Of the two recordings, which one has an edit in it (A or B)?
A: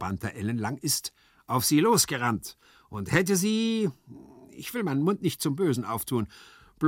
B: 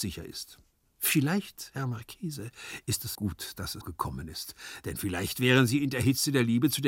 B